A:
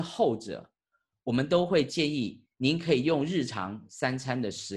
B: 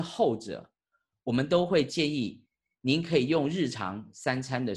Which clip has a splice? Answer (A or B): A